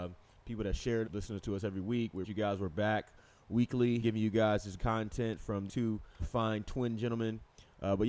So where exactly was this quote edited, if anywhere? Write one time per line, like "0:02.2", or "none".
0:01.0
0:02.2
0:04.0
0:04.8
0:05.7
0:06.2

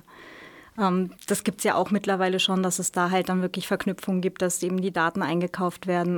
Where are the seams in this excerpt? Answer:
0:01.2

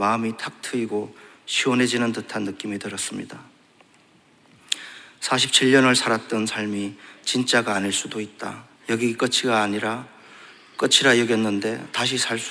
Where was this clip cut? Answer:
0:08.8

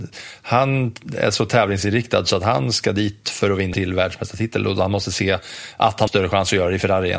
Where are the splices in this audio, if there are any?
0:03.7
0:06.1

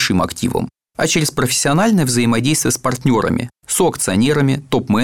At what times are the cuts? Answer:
none

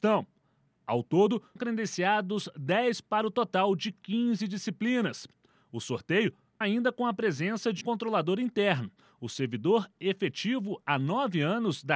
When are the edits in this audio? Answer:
0:01.6
0:03.0
0:06.6
0:07.8

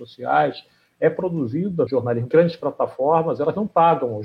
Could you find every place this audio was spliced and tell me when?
0:01.9
0:02.3

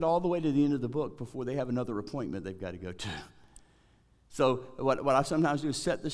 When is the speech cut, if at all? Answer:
none

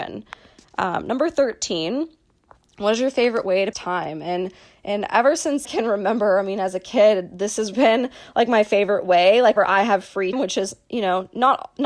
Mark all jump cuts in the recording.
0:03.7
0:05.6
0:07.7
0:09.6
0:10.3

